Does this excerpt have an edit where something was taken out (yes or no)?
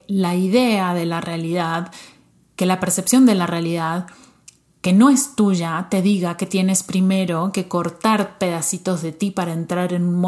no